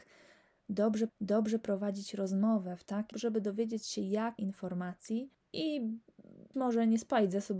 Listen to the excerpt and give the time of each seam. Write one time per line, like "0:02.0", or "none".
0:01.1
0:03.1
0:04.4
0:06.5